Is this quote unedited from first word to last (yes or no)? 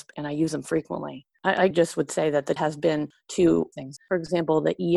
no